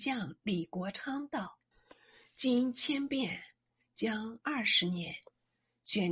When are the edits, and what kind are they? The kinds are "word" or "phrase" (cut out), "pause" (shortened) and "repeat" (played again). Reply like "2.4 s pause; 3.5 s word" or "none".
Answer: 1.7 s pause